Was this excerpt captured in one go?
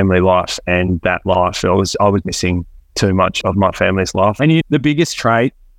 no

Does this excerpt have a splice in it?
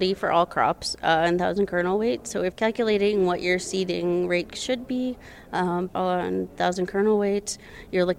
yes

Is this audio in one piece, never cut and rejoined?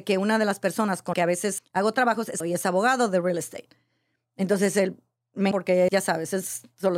no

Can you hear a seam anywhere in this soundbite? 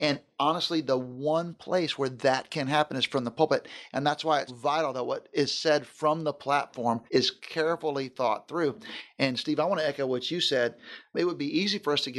yes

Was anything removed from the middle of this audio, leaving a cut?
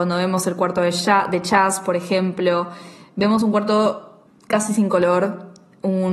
yes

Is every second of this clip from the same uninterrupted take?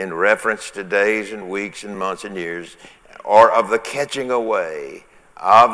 yes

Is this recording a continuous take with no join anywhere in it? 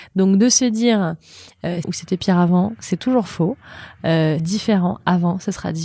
no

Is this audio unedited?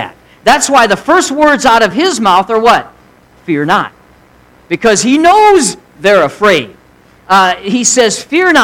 yes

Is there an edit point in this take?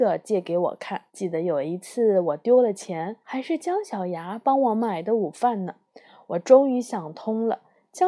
yes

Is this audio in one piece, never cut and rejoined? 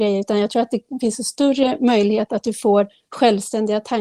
yes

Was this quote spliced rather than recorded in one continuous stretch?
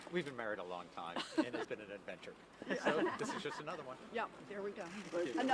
yes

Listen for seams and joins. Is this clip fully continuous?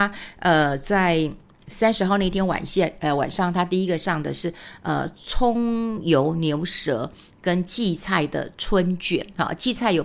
yes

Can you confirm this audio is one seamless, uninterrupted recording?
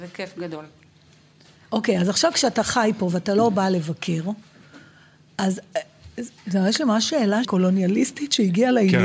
no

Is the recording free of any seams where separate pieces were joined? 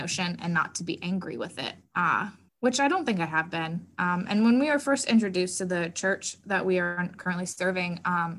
no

